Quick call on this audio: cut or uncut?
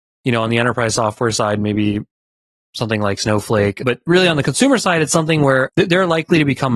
uncut